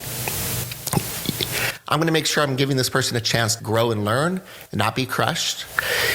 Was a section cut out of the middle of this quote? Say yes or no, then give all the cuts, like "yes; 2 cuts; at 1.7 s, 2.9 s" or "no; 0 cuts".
yes; 1 cut; at 3.6 s